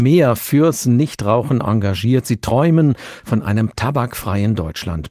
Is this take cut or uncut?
uncut